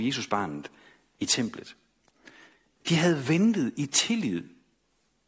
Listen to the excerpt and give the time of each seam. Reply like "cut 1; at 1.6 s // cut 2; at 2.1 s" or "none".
none